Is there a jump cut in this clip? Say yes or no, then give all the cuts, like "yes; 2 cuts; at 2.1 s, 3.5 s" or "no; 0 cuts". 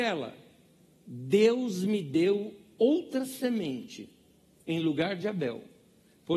no; 0 cuts